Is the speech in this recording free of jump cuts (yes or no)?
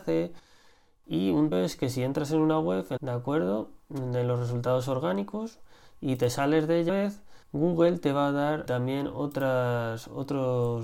no